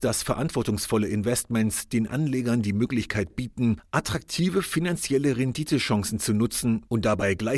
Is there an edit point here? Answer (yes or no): no